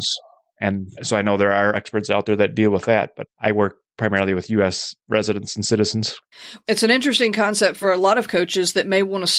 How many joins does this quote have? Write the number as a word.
three